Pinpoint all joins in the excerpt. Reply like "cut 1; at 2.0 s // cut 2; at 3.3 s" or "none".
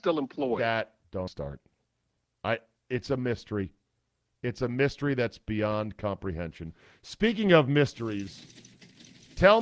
cut 1; at 1.3 s